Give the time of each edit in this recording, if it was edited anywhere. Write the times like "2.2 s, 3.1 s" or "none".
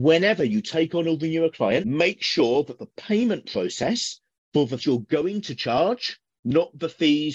4.8 s